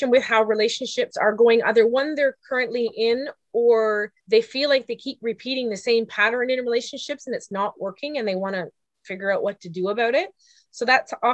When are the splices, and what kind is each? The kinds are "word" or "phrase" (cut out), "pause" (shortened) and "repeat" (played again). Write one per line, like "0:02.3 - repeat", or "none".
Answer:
0:04.2 - pause